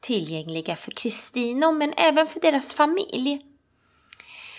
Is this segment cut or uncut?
uncut